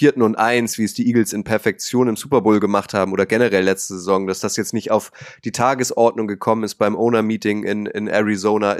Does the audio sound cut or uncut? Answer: uncut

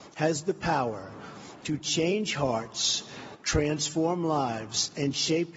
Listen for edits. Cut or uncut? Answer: uncut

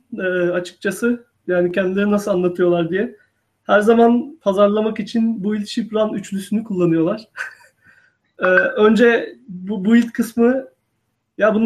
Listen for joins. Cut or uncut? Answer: uncut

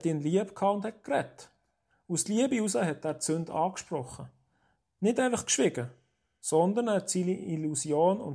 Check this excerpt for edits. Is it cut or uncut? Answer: uncut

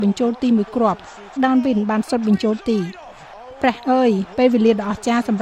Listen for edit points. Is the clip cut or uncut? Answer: cut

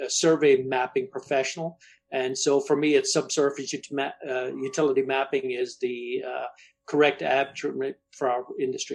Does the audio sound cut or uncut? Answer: uncut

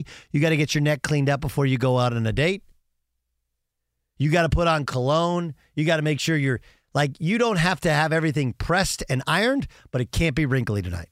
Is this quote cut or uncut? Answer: uncut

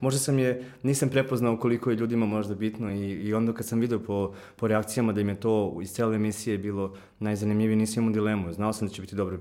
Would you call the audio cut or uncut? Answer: uncut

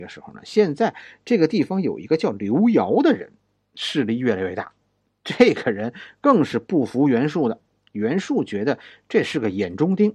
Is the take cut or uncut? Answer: uncut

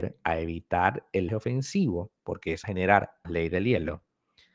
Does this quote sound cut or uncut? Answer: cut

